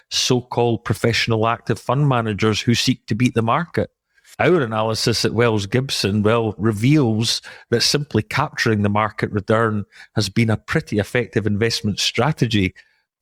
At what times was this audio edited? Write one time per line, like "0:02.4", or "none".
none

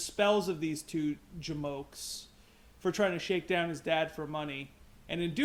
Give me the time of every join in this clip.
none

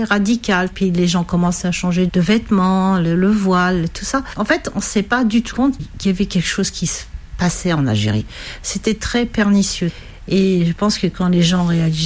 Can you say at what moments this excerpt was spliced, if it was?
0:02.1
0:05.5

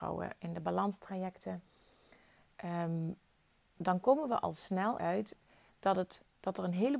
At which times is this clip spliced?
0:03.8
0:05.0

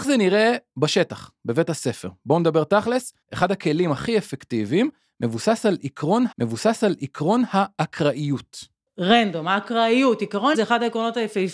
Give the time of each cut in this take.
0:03.2
0:06.3
0:10.5

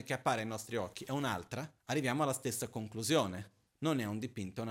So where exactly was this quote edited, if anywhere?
0:01.8
0:03.7

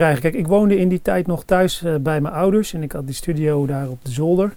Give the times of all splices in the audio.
none

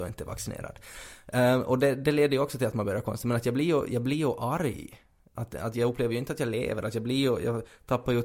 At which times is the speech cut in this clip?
none

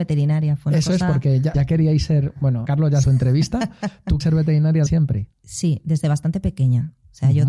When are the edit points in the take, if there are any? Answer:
0:01.5
0:02.7
0:03.0
0:04.2
0:04.9
0:05.3

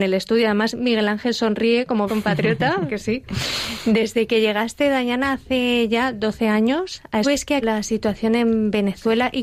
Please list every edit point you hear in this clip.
0:02.1
0:02.9
0:07.2
0:07.6

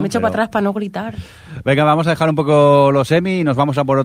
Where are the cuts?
none

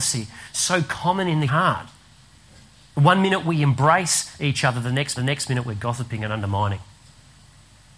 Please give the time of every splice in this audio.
0:01.5
0:05.2

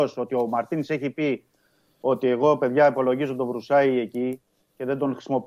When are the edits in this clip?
none

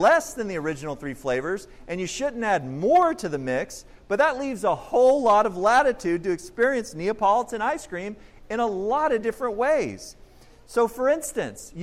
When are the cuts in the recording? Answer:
none

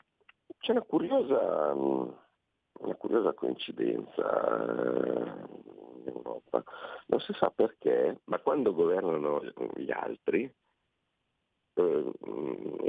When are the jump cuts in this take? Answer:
0:05.7
0:08.2

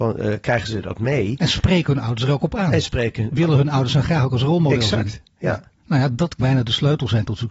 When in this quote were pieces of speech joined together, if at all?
0:05.8
0:06.4

